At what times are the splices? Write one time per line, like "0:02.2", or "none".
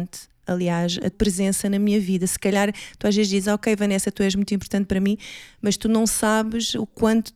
0:01.1